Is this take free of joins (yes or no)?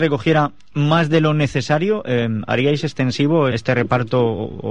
no